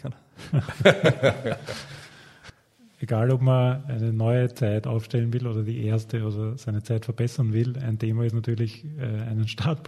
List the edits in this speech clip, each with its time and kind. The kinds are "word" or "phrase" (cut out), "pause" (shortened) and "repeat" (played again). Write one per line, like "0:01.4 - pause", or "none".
none